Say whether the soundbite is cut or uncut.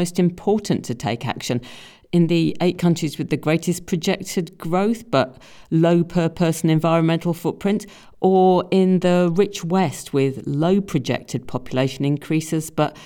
uncut